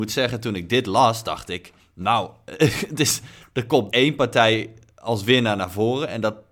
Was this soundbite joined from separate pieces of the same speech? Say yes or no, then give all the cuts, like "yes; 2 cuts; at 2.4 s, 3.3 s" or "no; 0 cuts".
yes; 2 cuts; at 1.8 s, 3.9 s